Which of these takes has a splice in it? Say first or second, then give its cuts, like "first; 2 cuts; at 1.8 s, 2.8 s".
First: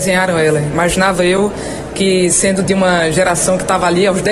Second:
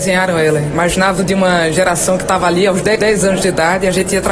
second; 1 cut; at 1.2 s